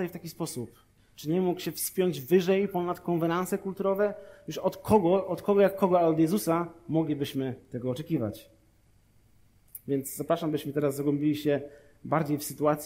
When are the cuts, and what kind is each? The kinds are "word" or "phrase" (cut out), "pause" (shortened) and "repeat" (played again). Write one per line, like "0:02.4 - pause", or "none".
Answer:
none